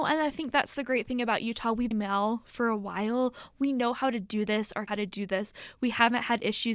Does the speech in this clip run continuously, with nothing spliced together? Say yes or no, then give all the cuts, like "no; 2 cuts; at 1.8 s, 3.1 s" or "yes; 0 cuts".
no; 2 cuts; at 1.9 s, 4.9 s